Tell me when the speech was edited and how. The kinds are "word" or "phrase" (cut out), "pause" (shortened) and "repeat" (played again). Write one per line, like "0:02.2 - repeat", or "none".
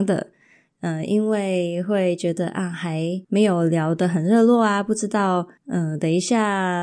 0:03.2 - pause
0:05.6 - pause